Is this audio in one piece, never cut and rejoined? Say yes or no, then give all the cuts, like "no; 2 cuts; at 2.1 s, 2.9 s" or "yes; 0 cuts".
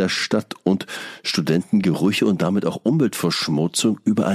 yes; 0 cuts